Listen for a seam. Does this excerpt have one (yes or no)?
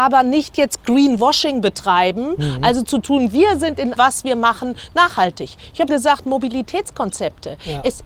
yes